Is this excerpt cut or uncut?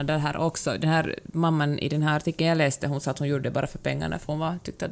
uncut